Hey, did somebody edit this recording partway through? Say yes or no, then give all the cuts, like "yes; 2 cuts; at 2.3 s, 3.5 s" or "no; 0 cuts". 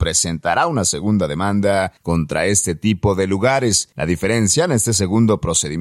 yes; 2 cuts; at 2.0 s, 3.9 s